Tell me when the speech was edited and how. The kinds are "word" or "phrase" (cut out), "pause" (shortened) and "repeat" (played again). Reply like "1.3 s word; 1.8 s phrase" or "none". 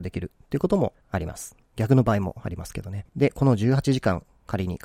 1.0 s pause; 1.6 s pause; 3.1 s pause